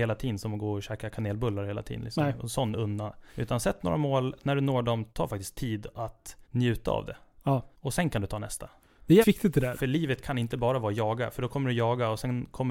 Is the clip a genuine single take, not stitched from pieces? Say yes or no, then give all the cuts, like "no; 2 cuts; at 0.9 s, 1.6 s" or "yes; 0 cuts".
no; 6 cuts; at 3.3 s, 5.1 s, 6.4 s, 7.7 s, 8.8 s, 9.2 s